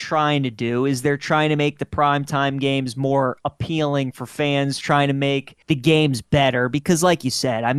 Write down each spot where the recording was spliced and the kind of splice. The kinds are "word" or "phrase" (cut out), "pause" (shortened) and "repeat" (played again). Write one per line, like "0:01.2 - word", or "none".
0:05.6 - pause